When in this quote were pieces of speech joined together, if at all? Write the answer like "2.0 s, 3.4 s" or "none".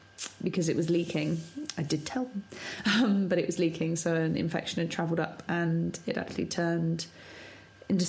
none